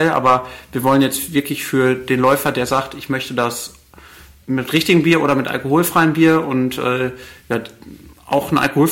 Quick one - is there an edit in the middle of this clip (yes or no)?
no